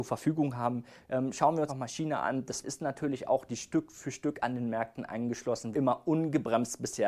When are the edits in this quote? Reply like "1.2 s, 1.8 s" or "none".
1.7 s, 2.6 s, 3.5 s, 5.7 s

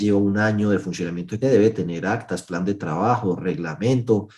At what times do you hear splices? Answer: 1.4 s

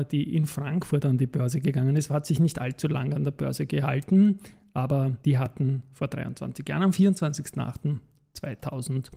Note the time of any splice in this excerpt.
5.2 s

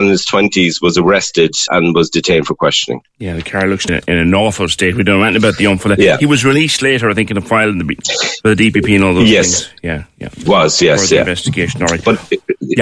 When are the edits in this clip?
1.7 s, 3.9 s, 10.5 s

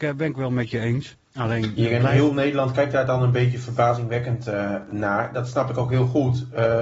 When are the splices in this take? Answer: 1.2 s

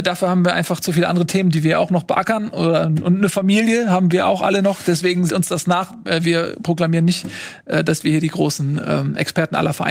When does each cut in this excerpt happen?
5.3 s

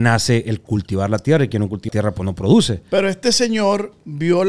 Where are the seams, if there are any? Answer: 1.9 s

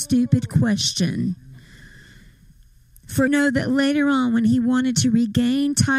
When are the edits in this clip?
3.3 s

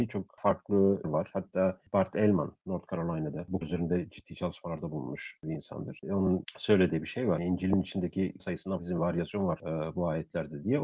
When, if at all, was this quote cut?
1.0 s, 3.6 s, 8.4 s, 8.8 s

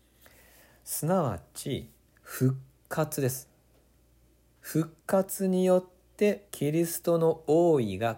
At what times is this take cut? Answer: 5.0 s, 6.5 s

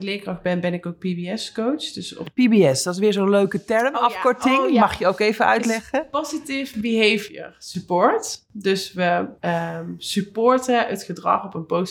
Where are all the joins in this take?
9.4 s

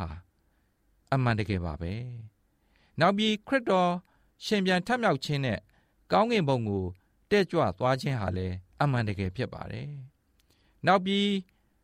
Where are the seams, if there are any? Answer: 8.7 s

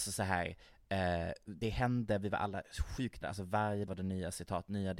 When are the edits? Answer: 1.6 s, 3.2 s, 3.9 s

